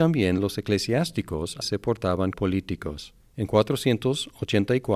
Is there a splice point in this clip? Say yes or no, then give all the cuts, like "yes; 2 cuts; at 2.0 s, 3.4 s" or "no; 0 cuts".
yes; 2 cuts; at 1.6 s, 2.3 s